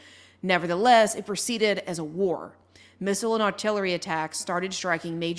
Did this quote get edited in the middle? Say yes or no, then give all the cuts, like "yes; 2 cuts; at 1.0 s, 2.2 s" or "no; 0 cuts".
no; 0 cuts